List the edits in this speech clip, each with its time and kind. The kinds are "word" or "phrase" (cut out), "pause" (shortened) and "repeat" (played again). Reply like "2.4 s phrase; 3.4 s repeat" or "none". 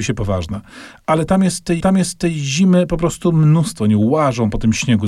1.8 s repeat